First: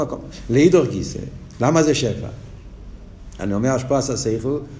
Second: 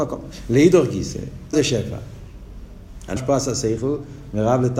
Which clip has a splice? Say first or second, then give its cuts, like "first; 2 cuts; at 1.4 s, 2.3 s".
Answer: second; 2 cuts; at 1.5 s, 3.2 s